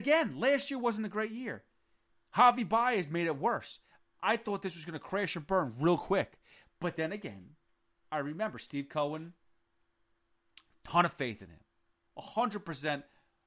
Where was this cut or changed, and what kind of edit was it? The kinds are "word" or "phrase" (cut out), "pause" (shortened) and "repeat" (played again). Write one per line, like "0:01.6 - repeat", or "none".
none